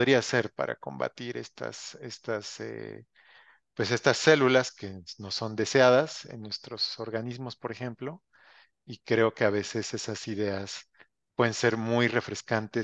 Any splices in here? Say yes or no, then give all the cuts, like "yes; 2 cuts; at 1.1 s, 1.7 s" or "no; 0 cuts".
no; 0 cuts